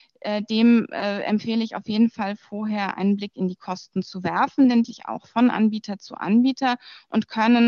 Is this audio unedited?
no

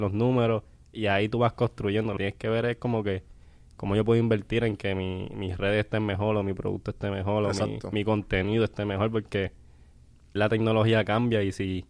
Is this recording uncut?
no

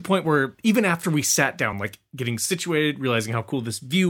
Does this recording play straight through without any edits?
yes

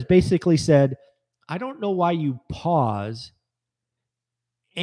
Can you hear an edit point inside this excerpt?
no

